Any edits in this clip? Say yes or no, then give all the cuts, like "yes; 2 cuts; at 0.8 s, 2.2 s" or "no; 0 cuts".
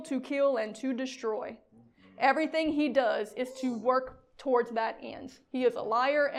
no; 0 cuts